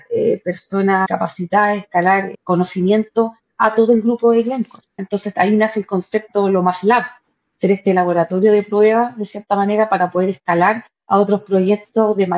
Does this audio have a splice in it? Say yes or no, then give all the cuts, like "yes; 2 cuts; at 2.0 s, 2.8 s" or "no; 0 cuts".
no; 0 cuts